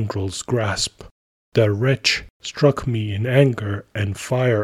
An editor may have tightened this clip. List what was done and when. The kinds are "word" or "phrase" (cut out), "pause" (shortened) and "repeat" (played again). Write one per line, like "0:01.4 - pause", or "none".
none